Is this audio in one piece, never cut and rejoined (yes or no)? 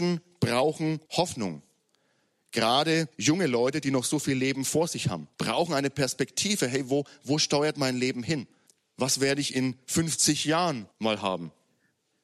no